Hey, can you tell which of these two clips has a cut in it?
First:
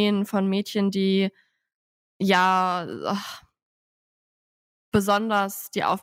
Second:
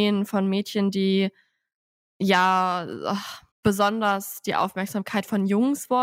second; 1 cut; at 3.5 s

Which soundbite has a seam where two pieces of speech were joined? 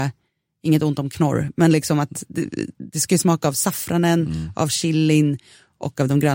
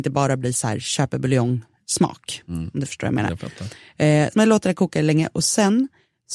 second; 1 cut; at 4.3 s

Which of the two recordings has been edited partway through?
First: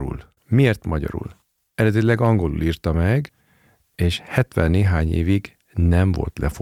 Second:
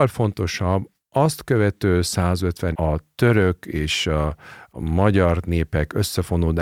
second; 1 cut; at 2.7 s

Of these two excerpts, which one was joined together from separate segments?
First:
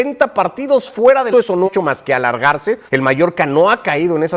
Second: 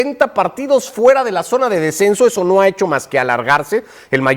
first; 3 cuts; at 1.3 s, 1.7 s, 2.9 s

